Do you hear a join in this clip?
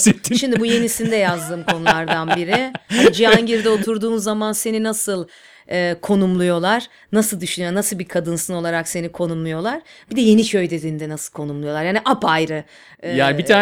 no; 0 cuts

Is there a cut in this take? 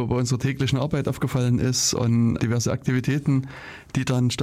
yes; 1 cut; at 2.4 s

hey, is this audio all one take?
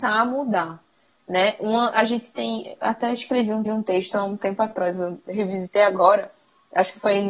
no; 1 cut; at 3.7 s

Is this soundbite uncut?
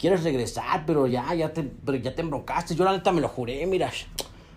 yes; 0 cuts

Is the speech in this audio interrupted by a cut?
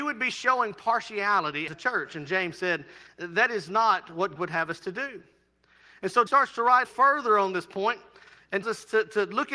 yes; 5 cuts; at 1.7 s, 4.4 s, 6.3 s, 6.8 s, 8.6 s

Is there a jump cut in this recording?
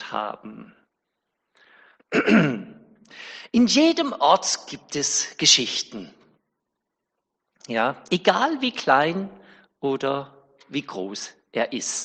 no; 0 cuts

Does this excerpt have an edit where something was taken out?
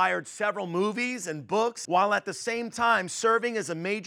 yes; 1 cut; at 1.8 s

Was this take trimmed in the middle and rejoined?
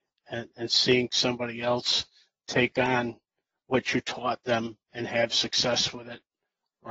no; 0 cuts

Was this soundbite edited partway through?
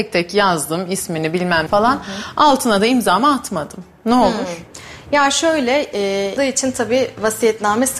yes; 2 cuts; at 1.7 s, 6.4 s

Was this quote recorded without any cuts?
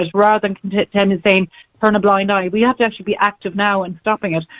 yes; 0 cuts

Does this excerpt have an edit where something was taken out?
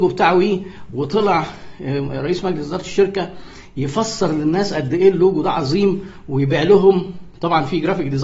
no; 0 cuts

